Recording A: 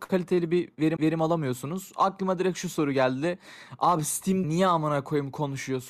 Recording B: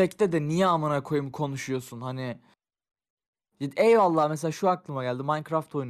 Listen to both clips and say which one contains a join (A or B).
A